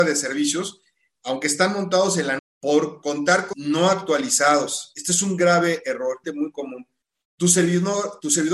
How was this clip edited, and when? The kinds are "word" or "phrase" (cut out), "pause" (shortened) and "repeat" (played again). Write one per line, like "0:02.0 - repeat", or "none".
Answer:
0:02.4 - word
0:03.5 - word
0:06.2 - word